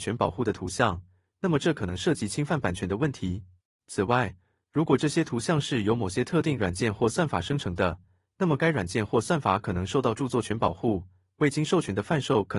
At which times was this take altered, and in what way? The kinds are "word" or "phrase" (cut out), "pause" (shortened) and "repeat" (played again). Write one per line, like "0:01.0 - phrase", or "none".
none